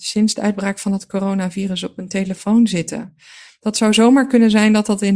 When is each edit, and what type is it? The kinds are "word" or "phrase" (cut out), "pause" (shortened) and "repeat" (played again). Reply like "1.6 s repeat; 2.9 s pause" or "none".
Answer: none

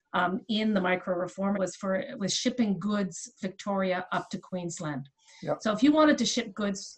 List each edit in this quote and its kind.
1.5 s word; 2.2 s word; 3.4 s word

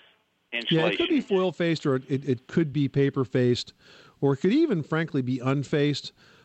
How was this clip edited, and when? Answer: none

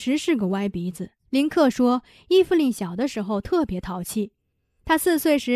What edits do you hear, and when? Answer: 1.2 s pause

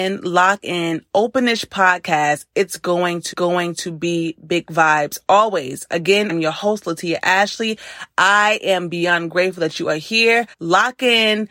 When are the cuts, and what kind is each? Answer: 3.3 s repeat; 6.3 s word; 10.5 s pause

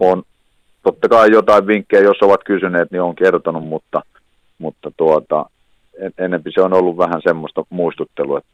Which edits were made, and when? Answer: none

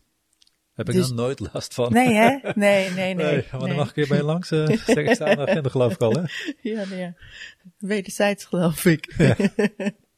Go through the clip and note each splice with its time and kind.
none

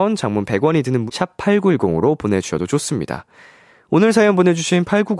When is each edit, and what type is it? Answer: 1.1 s word

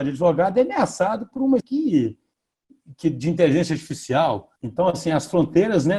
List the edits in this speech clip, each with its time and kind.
1.6 s word; 4.6 s pause

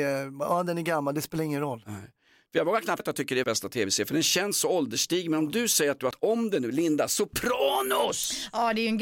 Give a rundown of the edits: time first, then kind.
3.0 s word; 3.4 s word; 6.1 s word

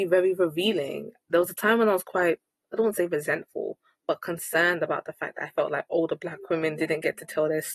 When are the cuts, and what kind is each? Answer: none

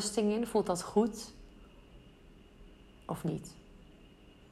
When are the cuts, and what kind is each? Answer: none

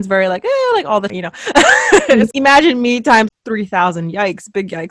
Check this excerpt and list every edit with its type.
1.1 s word; 2.3 s word; 3.3 s word

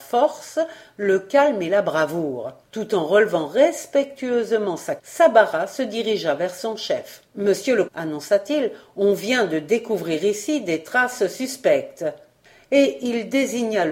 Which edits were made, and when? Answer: 2.6 s pause; 5.0 s word; 7.3 s pause; 7.9 s word

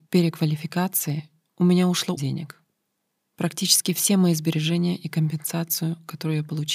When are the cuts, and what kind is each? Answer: 2.2 s phrase

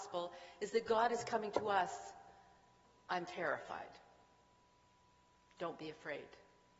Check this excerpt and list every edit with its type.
none

